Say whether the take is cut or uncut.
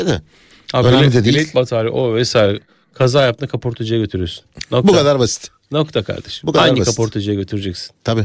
uncut